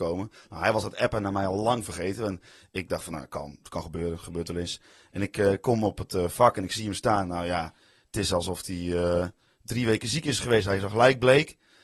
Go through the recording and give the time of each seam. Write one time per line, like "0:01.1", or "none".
none